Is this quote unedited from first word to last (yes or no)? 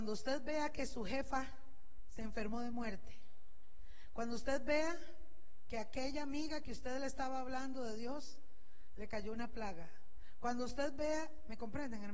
yes